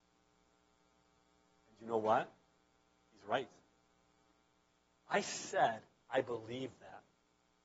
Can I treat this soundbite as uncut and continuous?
yes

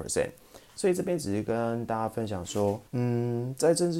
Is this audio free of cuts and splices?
no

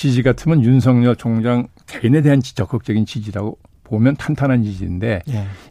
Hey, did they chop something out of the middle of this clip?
no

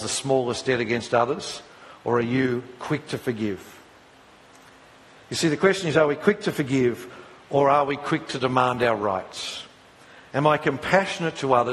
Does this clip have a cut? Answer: no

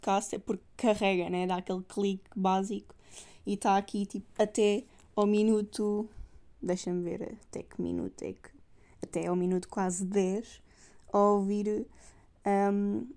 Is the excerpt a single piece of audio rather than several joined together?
yes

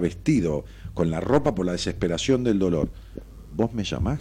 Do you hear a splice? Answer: no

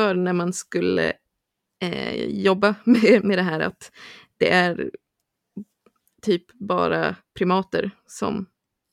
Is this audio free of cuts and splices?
yes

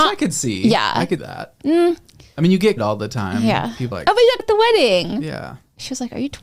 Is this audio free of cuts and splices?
no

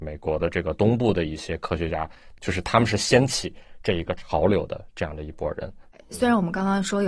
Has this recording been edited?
no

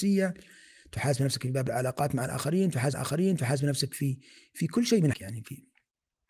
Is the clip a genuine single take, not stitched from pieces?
no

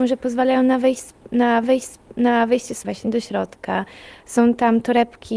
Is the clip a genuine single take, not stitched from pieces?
no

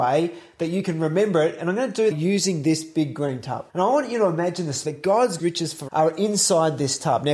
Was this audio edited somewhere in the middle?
yes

